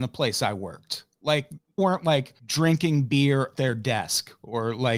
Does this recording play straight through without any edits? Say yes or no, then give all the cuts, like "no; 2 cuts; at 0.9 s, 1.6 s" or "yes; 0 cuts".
no; 2 cuts; at 1.8 s, 3.6 s